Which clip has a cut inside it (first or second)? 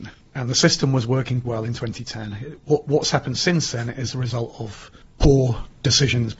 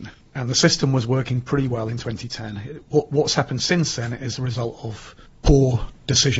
first